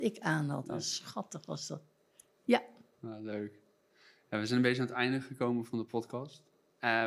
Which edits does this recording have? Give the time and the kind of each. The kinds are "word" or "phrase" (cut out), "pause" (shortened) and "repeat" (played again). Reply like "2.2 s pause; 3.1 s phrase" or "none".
none